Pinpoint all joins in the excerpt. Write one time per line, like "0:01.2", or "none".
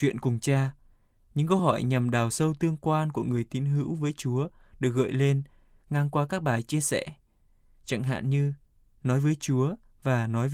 none

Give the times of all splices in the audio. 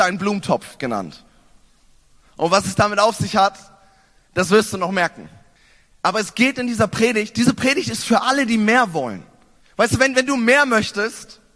0:05.5
0:09.6

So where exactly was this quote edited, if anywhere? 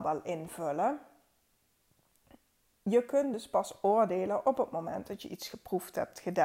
none

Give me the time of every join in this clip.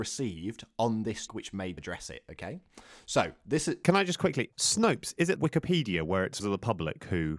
0:01.3
0:01.8
0:04.5
0:05.4
0:06.4

